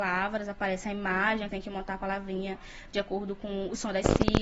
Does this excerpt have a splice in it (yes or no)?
yes